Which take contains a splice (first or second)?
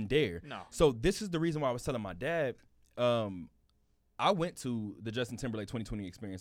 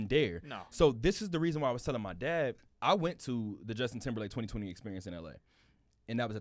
second